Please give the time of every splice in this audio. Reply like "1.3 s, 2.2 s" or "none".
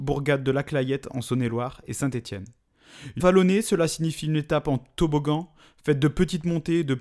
3.2 s